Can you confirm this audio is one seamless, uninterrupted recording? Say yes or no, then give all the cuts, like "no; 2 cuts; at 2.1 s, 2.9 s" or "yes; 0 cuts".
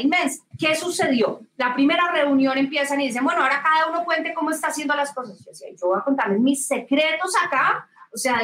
yes; 0 cuts